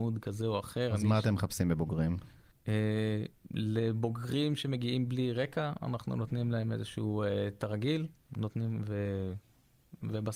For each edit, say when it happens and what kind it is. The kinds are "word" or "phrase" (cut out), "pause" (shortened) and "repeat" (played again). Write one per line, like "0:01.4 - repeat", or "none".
0:02.5 - pause